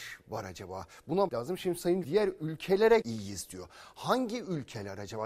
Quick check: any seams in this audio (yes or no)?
yes